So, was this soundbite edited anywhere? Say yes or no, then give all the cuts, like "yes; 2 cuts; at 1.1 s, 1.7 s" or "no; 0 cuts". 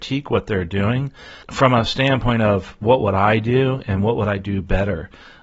yes; 1 cut; at 1.4 s